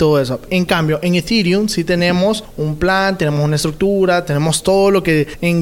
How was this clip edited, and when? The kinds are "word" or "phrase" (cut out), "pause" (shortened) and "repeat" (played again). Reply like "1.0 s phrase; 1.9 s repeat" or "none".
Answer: none